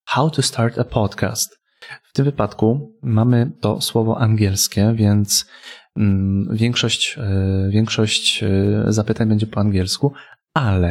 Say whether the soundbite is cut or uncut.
uncut